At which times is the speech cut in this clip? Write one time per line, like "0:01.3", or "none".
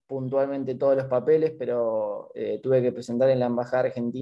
none

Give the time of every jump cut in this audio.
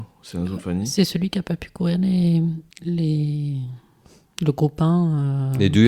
0:02.7

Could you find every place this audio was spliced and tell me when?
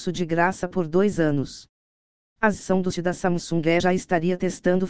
0:02.6
0:02.9
0:03.8

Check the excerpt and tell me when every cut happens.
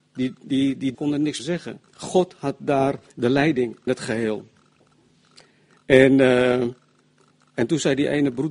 0:00.9
0:01.4
0:01.9
0:03.1
0:03.9

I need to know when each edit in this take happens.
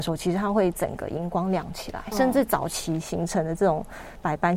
0:02.1

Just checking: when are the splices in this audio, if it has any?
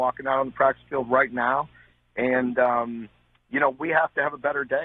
none

